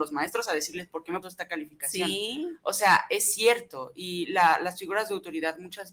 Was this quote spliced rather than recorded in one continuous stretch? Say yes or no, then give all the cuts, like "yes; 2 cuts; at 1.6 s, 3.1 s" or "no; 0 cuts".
yes; 1 cut; at 1.2 s